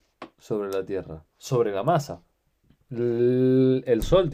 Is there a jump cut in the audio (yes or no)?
yes